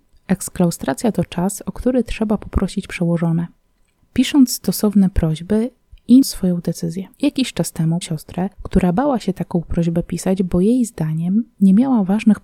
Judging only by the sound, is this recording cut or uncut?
cut